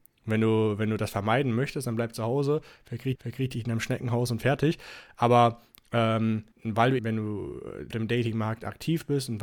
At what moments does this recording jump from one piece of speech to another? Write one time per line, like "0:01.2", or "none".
0:03.1
0:06.5
0:07.0
0:07.9